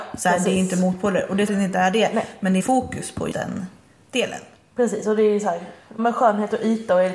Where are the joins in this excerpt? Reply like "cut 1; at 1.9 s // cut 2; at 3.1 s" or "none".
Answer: cut 1; at 1.5 s // cut 2; at 2.6 s // cut 3; at 3.3 s // cut 4; at 6.0 s